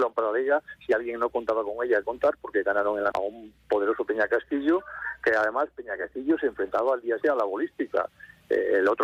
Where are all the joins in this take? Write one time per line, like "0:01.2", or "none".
0:02.0
0:03.1
0:07.2